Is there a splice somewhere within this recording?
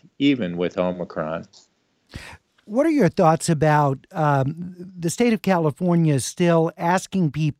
no; 0 cuts

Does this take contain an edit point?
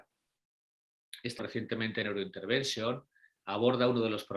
yes; 1 cut; at 1.4 s

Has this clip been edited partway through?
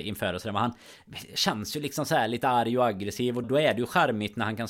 yes; 1 cut; at 3.4 s

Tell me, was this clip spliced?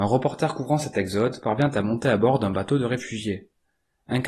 no; 0 cuts

